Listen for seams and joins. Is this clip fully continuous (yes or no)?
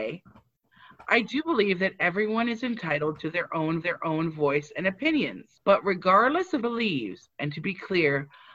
no